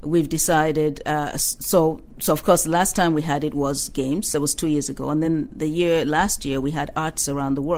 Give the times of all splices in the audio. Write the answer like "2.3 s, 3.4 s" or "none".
none